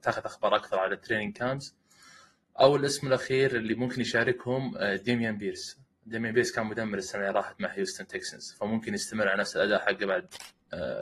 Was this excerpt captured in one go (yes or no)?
yes